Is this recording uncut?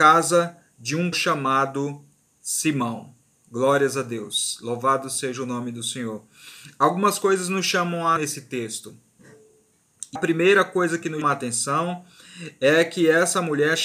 no; 4 cuts; at 1.1 s, 8.2 s, 10.2 s, 11.2 s

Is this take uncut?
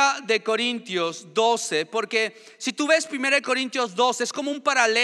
yes; 0 cuts

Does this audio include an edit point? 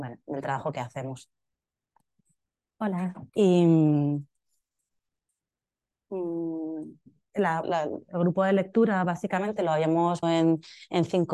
yes; 3 cuts; at 3.3 s, 7.6 s, 10.2 s

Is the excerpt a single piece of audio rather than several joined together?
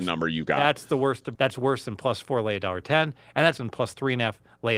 no; 2 cuts; at 1.3 s, 3.6 s

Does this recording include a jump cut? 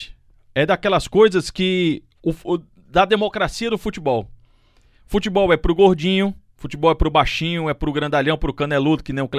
no; 0 cuts

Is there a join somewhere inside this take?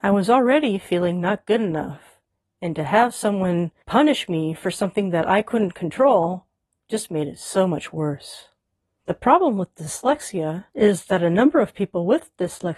no; 0 cuts

